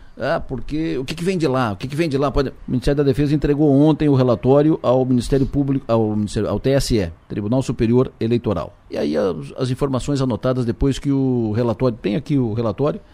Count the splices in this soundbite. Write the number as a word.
two